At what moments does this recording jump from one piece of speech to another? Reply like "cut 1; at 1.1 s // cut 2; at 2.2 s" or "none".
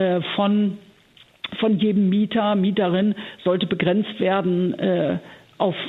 none